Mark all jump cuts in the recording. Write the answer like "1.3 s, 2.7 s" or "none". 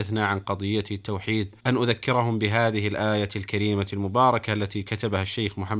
1.6 s